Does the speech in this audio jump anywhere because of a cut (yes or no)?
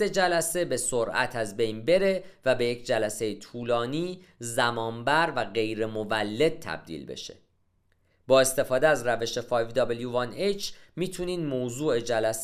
no